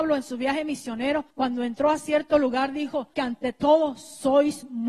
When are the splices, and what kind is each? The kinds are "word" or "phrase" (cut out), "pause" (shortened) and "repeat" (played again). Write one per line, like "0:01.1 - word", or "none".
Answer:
0:01.3 - pause
0:03.1 - word